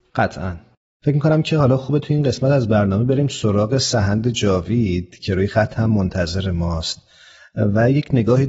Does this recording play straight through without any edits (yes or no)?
yes